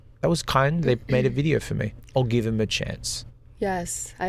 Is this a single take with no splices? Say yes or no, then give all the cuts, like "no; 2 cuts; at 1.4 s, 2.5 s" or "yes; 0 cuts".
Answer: yes; 0 cuts